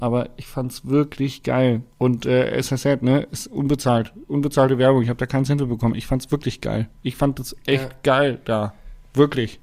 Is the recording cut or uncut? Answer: cut